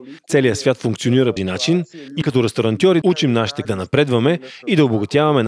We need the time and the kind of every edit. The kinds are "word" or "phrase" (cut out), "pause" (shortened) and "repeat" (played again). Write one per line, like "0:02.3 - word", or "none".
0:01.4 - phrase
0:02.2 - word
0:03.0 - word
0:03.6 - word